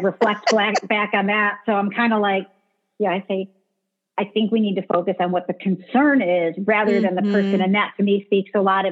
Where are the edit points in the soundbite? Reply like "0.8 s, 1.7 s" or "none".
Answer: none